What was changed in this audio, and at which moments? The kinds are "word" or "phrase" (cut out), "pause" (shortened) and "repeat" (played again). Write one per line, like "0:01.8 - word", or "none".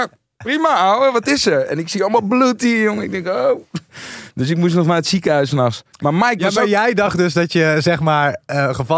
none

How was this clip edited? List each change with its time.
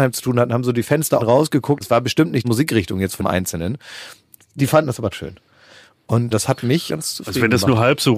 0:01.2 - word
0:01.8 - word
0:02.4 - word
0:03.2 - word
0:05.1 - word
0:06.3 - word
0:06.9 - word

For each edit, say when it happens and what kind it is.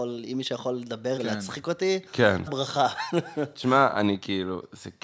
0:01.2 - word
0:02.5 - word

